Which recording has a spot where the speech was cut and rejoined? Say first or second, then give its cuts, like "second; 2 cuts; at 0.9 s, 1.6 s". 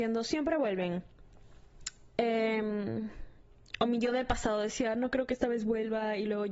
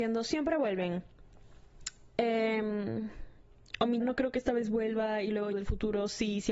second; 2 cuts; at 4.0 s, 5.5 s